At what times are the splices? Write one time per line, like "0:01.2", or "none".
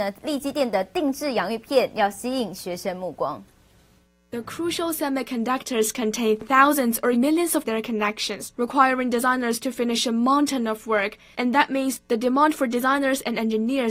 0:07.1
0:07.6
0:08.5